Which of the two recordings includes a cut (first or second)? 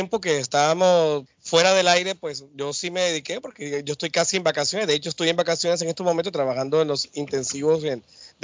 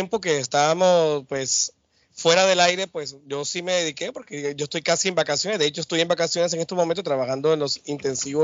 first